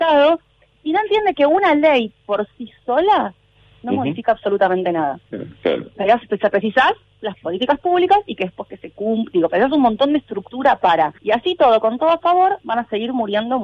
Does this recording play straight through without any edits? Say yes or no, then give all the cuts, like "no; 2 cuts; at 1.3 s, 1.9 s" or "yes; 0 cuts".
no; 1 cut; at 11.2 s